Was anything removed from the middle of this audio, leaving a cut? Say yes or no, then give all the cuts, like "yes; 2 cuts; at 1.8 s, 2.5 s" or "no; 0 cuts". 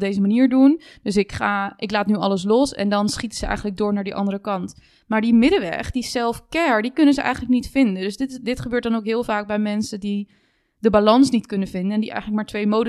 no; 0 cuts